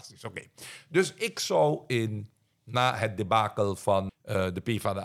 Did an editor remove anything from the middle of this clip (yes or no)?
yes